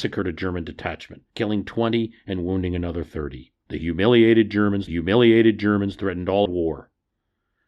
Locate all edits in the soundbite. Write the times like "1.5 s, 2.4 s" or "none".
1.3 s, 3.6 s, 4.9 s, 6.5 s

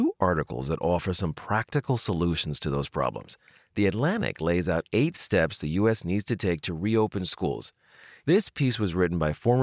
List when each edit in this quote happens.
none

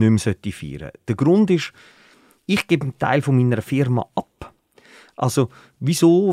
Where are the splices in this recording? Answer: none

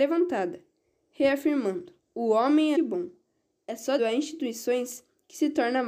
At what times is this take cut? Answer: 2.0 s, 2.7 s, 4.0 s

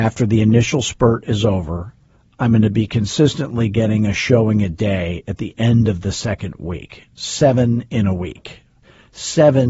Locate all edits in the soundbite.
none

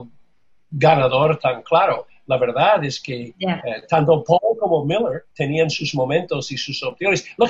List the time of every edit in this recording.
5.3 s

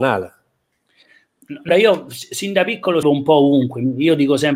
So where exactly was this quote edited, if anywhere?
1.7 s, 3.0 s

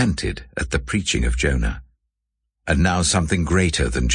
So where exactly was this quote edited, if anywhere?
none

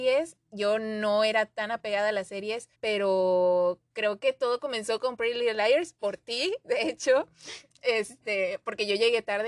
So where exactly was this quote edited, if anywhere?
2.7 s

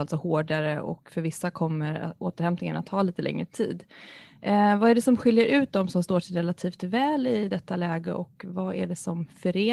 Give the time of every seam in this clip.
none

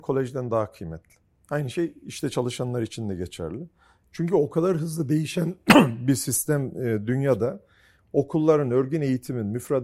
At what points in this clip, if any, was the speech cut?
none

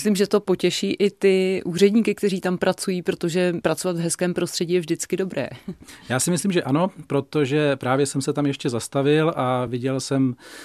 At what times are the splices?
none

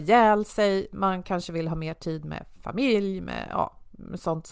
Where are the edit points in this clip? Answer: none

